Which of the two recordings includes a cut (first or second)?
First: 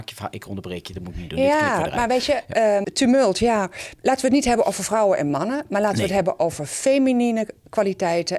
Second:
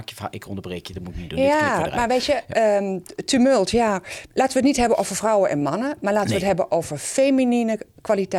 first